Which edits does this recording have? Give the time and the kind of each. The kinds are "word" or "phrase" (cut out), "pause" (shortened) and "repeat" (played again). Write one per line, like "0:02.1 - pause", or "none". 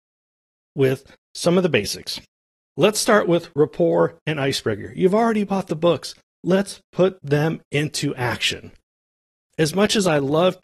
none